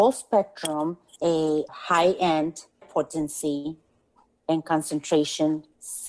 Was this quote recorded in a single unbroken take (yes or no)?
no